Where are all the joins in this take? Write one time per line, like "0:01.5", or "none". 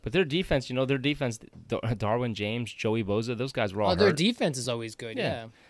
none